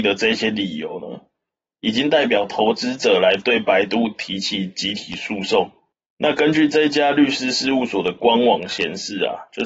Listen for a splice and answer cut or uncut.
uncut